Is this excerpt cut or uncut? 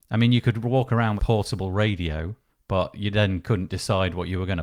cut